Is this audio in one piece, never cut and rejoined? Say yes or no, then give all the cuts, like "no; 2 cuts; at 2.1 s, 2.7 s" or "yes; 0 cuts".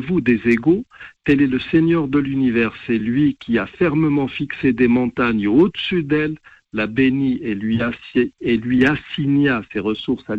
yes; 0 cuts